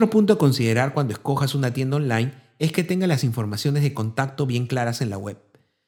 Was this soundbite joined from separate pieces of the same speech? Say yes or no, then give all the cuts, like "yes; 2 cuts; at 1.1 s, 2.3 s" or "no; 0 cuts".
no; 0 cuts